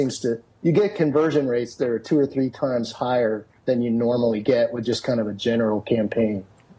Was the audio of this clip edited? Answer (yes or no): yes